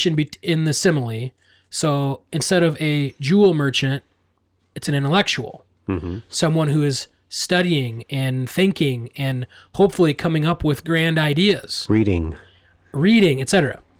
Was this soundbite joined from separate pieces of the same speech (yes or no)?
no